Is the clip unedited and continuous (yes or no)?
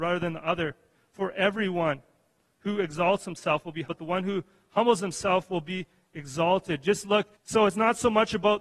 no